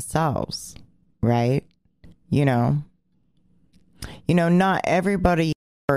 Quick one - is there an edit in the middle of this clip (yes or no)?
yes